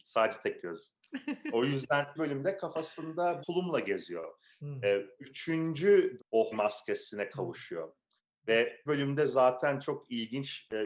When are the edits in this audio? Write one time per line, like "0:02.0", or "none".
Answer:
0:02.2
0:03.4
0:06.2
0:06.5
0:08.9

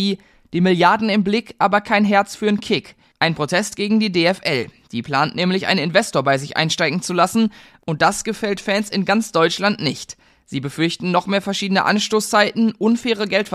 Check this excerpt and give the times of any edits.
none

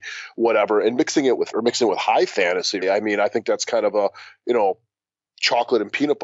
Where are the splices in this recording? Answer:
0:01.5
0:02.8

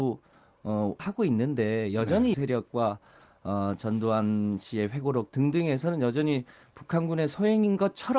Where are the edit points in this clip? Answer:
0:01.0
0:02.3

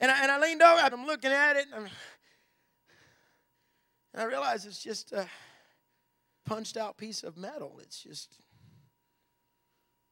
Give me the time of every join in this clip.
0:00.9
0:06.4

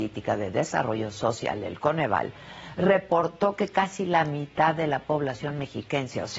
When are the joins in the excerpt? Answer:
none

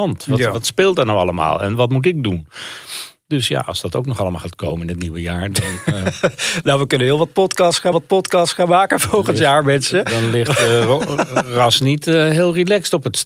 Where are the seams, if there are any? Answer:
0:07.9

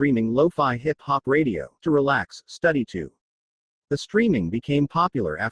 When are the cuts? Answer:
0:01.8

